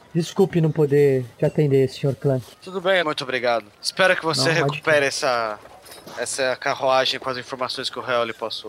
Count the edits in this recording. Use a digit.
3